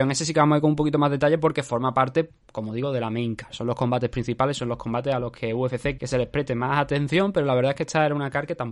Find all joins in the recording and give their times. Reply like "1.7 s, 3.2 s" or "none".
6.0 s